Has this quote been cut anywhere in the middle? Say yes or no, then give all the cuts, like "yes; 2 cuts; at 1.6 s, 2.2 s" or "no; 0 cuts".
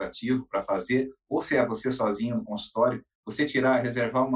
yes; 1 cut; at 3.1 s